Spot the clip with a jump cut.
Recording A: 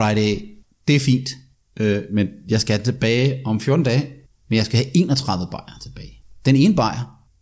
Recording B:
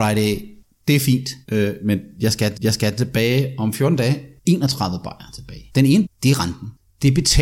B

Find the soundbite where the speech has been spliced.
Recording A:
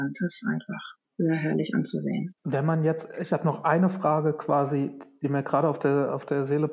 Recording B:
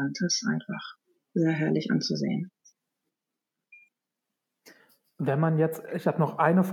A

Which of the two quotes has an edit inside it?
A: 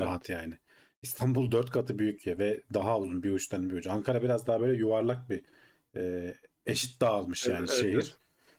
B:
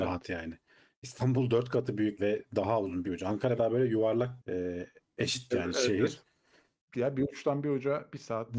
B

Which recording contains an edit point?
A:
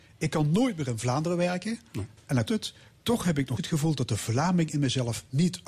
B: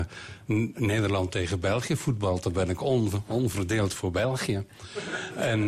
A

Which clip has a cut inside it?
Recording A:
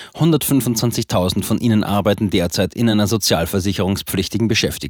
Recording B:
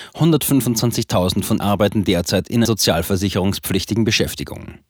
B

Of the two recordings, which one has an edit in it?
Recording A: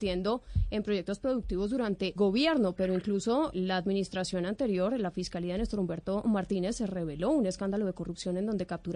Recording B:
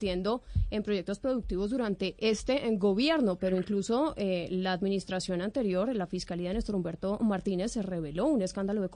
A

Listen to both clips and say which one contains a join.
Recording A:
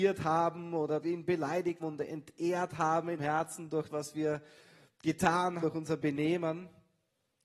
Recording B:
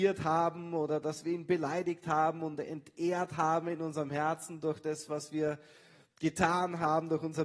A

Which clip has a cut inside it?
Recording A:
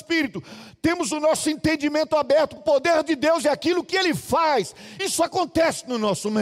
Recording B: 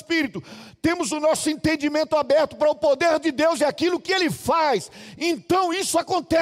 A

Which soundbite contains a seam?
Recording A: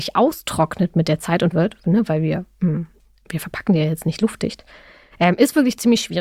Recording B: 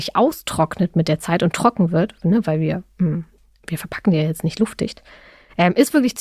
A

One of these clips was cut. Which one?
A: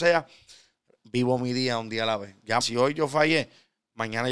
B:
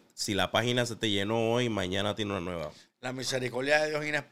A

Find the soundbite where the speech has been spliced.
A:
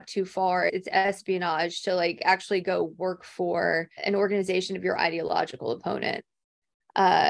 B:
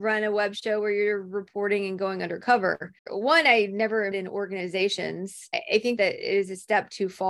B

